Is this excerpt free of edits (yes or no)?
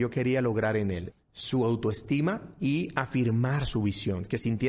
no